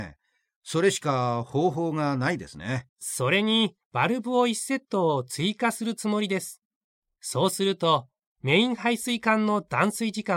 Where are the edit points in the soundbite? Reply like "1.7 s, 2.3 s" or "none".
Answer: 2.9 s, 3.8 s

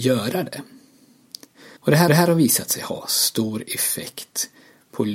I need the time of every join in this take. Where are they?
1.8 s, 2.1 s

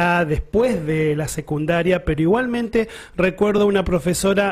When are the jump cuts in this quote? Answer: none

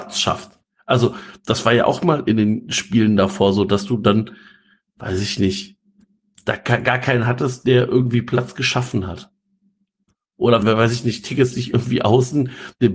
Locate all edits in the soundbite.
10.6 s

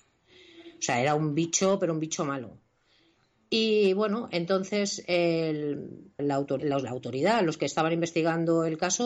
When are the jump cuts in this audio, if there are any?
6.2 s, 6.6 s

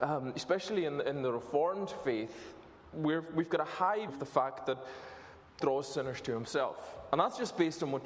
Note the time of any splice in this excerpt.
2.9 s, 4.1 s, 5.6 s

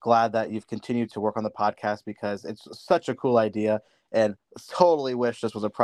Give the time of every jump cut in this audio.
none

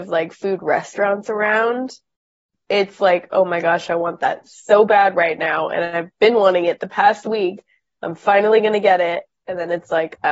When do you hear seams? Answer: none

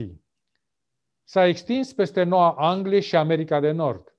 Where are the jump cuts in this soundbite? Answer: none

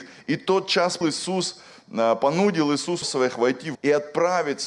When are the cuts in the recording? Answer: 1.0 s, 3.0 s, 3.7 s

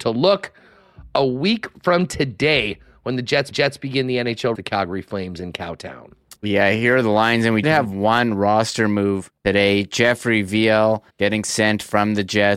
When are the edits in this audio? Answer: 3.5 s, 4.5 s, 6.4 s, 7.6 s, 9.4 s, 11.1 s

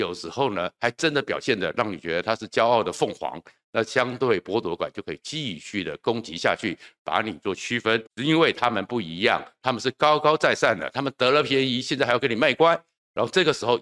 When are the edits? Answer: 8.1 s

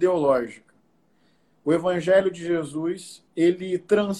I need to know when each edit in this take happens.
3.3 s

